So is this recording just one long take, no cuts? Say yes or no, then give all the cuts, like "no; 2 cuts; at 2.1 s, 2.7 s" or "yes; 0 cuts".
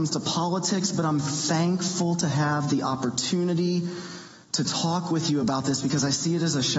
yes; 0 cuts